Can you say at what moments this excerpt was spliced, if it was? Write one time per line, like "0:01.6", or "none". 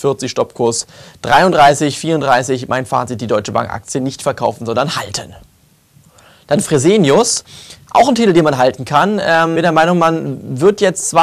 0:09.6